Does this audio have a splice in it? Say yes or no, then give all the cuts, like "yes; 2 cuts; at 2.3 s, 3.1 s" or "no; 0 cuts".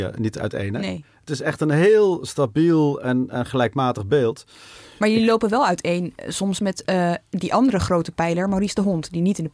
no; 0 cuts